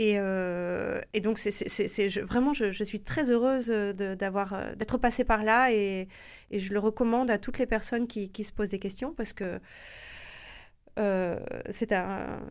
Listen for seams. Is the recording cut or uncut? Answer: uncut